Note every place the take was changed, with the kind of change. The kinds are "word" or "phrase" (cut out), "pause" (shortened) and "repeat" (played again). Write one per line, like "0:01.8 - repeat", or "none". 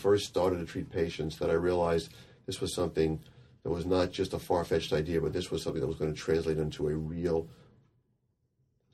none